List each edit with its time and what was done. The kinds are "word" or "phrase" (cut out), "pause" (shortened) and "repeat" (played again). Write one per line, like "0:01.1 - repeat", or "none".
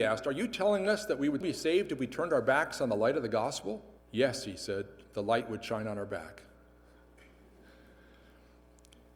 0:01.4 - word
0:04.0 - pause